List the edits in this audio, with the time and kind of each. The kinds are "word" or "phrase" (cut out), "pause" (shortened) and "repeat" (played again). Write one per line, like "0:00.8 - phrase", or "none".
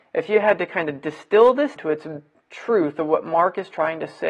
0:01.8 - word
0:02.3 - word